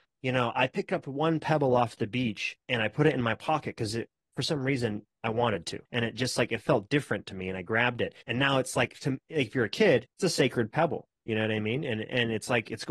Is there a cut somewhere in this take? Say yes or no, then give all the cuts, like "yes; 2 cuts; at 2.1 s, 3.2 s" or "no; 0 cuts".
yes; 3 cuts; at 5.9 s, 8.2 s, 10.1 s